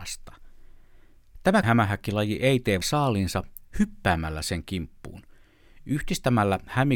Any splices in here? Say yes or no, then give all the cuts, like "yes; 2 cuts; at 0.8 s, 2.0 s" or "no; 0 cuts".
yes; 2 cuts; at 1.6 s, 2.8 s